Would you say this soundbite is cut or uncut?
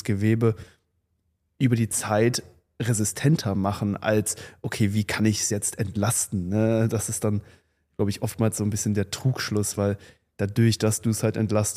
uncut